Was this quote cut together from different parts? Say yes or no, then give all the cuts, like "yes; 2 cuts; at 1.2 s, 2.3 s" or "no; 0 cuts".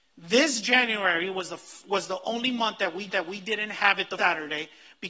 yes; 2 cuts; at 3.1 s, 4.2 s